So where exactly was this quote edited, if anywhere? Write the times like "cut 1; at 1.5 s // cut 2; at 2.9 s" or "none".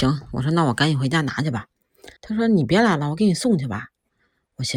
cut 1; at 2.2 s

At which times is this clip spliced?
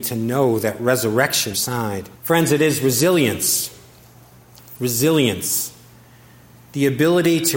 cut 1; at 1.5 s // cut 2; at 2.1 s

